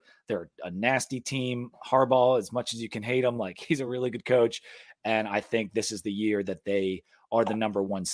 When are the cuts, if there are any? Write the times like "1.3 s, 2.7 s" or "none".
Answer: none